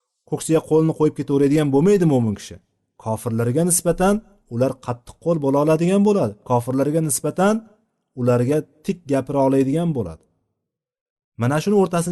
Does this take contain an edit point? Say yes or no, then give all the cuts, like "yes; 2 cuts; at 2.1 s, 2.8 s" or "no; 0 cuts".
no; 0 cuts